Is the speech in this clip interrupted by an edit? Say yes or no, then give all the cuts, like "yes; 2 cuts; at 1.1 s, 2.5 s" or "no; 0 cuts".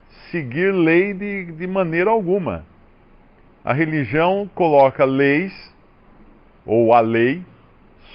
no; 0 cuts